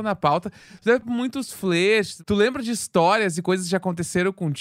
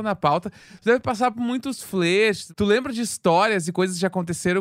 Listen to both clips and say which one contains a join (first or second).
first